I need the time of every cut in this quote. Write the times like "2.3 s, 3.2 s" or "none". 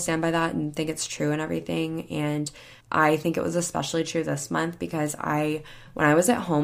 2.8 s